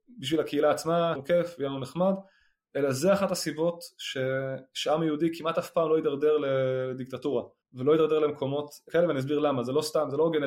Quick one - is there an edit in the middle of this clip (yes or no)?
yes